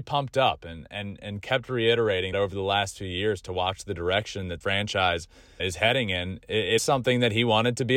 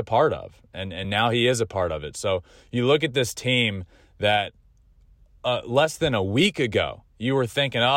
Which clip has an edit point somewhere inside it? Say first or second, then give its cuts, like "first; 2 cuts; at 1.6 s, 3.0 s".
first; 4 cuts; at 2.3 s, 4.6 s, 5.6 s, 6.8 s